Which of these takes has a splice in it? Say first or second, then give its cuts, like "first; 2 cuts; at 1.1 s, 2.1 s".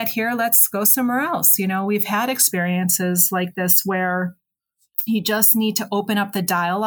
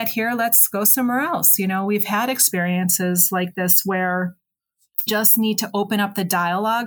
second; 1 cut; at 5.1 s